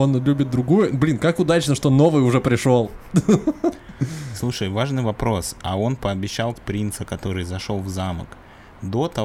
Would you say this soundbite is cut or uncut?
cut